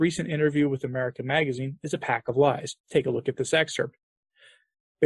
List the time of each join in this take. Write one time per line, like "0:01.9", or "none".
0:02.8